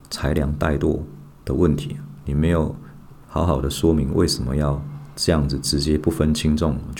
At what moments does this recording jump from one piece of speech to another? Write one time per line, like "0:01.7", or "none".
0:03.2

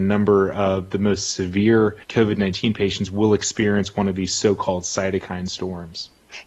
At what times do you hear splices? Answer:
0:02.0

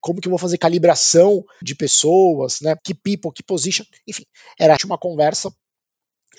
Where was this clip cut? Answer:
0:01.6
0:02.8
0:04.8

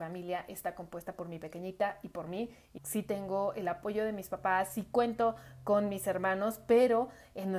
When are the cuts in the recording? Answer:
0:02.8

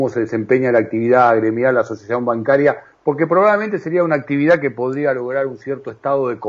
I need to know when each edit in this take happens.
none

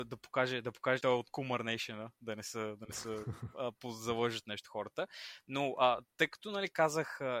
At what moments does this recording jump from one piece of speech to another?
0:01.0

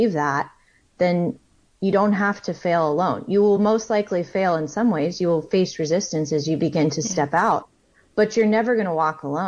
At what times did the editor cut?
none

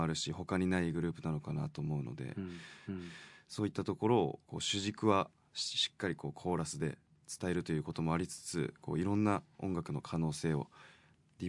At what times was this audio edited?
0:02.9
0:04.4

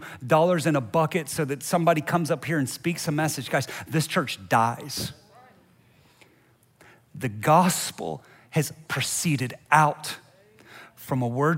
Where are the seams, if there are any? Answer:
0:08.9

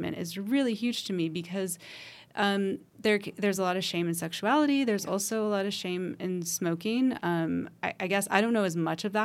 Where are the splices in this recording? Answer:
none

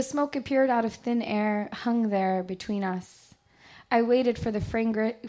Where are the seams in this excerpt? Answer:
none

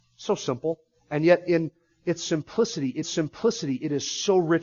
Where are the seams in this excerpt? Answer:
0:03.0

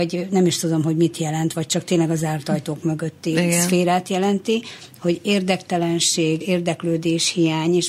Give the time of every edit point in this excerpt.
0:06.4

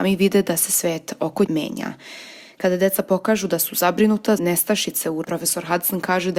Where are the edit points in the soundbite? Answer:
0:01.5
0:04.4
0:05.2

